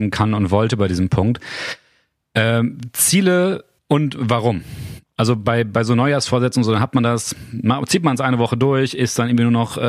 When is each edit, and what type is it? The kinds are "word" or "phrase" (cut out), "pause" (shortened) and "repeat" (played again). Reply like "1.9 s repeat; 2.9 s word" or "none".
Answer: 3.8 s pause

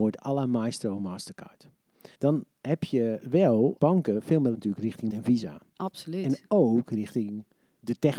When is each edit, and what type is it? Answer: 2.1 s pause; 3.8 s word; 4.5 s word; 5.1 s word

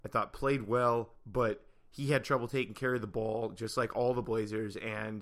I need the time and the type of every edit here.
none

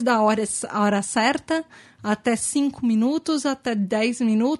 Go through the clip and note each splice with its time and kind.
none

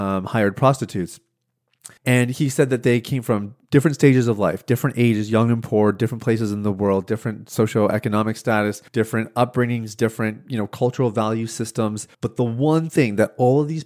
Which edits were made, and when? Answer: 2.0 s pause; 8.9 s pause; 12.1 s pause

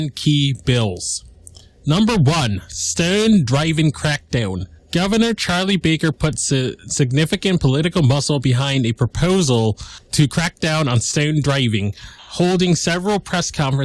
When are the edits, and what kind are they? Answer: none

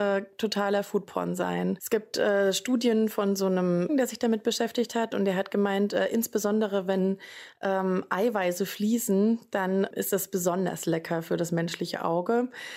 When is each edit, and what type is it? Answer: 3.9 s phrase

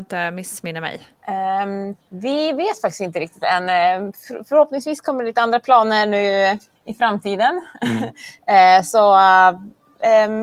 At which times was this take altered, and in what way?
2.0 s pause; 6.8 s pause

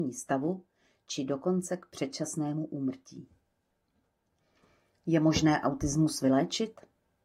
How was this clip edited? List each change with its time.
none

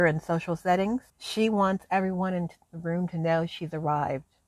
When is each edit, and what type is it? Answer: 1.1 s pause

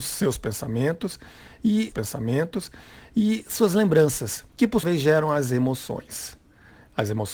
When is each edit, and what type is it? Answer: 1.9 s repeat; 4.5 s pause; 4.8 s word

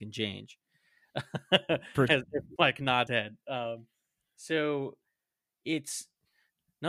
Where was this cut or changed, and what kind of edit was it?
2.1 s word; 2.6 s word; 3.1 s word

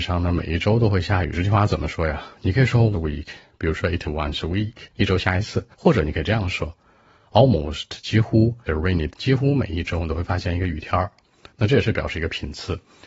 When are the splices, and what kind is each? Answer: 2.9 s word; 4.0 s word; 4.9 s pause; 5.7 s pause; 8.7 s phrase; 9.1 s word

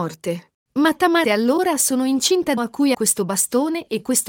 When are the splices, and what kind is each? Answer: 1.2 s word; 2.6 s word; 2.9 s word

